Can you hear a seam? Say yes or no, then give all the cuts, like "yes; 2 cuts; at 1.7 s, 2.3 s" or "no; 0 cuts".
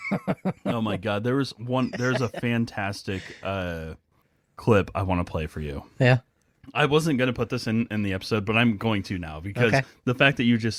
yes; 1 cut; at 4.2 s